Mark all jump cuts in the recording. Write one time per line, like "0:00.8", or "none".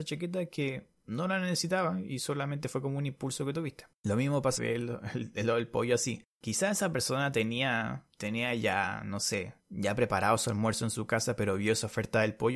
0:04.0
0:04.6
0:06.3
0:08.1
0:09.6